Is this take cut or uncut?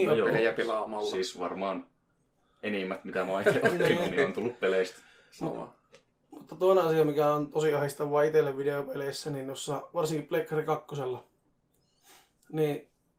uncut